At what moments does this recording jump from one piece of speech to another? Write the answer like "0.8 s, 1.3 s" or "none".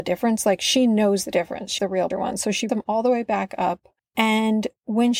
1.8 s, 2.1 s, 2.7 s, 4.0 s